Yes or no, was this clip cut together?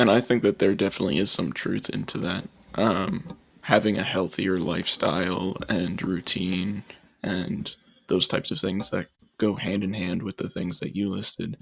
no